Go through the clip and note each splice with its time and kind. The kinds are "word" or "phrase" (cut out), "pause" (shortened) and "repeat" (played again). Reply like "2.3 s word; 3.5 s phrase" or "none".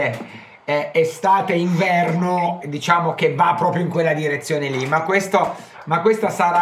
2.6 s word